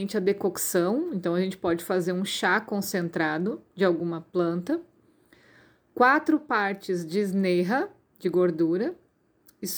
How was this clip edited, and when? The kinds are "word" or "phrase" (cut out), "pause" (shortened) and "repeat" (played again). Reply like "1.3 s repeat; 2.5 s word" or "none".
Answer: none